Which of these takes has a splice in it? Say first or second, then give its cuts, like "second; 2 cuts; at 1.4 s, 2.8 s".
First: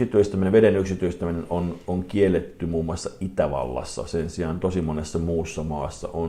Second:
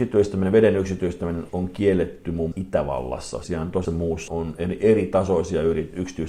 second; 5 cuts; at 1.5 s, 2.5 s, 3.4 s, 3.8 s, 4.3 s